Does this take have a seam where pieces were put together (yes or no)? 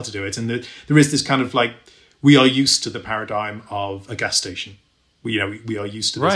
no